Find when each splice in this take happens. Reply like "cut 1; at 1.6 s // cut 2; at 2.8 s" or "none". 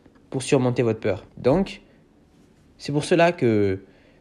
cut 1; at 1.3 s